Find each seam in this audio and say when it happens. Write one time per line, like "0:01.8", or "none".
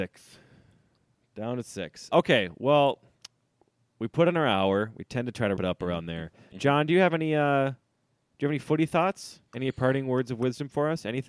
0:02.1
0:05.6
0:09.5